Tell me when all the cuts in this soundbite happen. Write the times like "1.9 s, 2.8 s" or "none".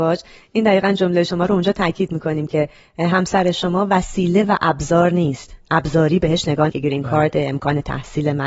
6.7 s